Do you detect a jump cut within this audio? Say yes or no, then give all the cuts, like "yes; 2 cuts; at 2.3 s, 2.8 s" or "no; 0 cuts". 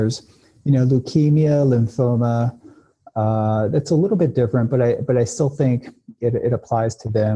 no; 0 cuts